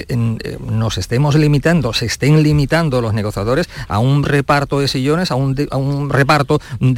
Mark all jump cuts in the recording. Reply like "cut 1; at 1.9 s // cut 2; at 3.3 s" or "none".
none